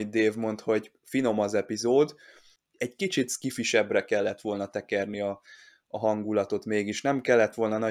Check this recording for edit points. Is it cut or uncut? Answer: uncut